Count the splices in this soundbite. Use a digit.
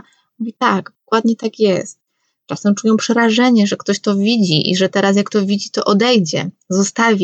0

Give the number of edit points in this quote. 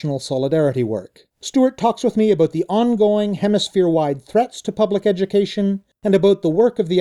1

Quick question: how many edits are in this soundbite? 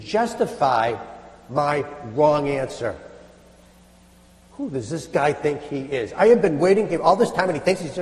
0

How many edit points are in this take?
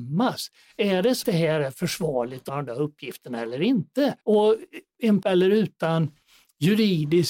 4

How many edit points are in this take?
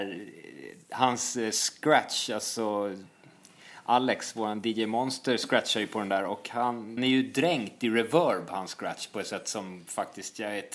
1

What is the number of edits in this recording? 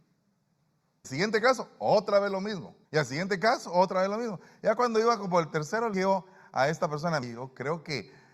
4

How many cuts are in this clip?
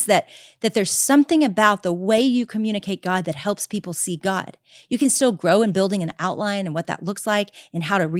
0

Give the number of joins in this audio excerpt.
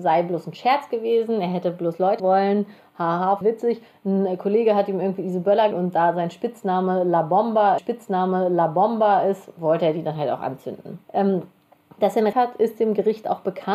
6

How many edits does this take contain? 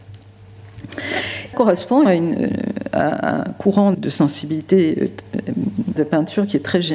4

